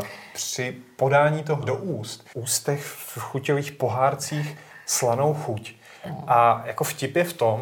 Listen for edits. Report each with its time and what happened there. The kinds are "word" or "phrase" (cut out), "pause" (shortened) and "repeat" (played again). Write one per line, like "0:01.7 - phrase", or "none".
0:01.6 - word
0:02.3 - phrase